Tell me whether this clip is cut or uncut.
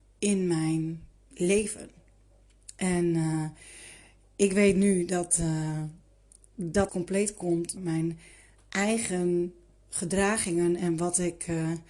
cut